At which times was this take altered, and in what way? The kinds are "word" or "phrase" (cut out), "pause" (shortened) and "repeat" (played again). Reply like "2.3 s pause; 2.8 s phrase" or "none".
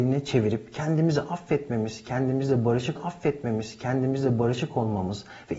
3.0 s repeat